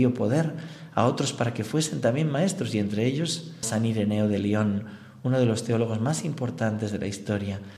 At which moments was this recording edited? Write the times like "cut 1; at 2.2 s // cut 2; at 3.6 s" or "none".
cut 1; at 3.6 s